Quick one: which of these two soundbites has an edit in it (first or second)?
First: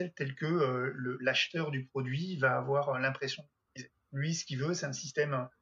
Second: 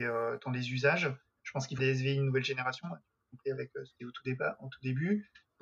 second